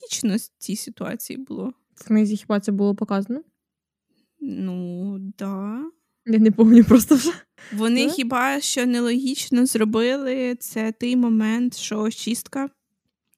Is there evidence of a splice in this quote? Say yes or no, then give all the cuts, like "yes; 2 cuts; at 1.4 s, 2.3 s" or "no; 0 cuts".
no; 0 cuts